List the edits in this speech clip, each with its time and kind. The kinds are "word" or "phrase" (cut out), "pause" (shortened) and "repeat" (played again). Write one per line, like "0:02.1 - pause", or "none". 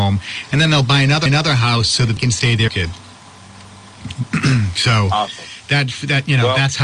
0:01.3 - repeat
0:02.2 - word
0:02.7 - phrase